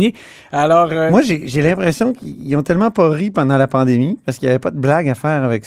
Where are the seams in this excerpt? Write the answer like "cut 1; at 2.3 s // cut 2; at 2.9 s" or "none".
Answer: none